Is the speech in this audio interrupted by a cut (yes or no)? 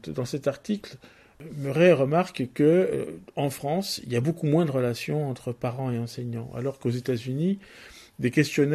no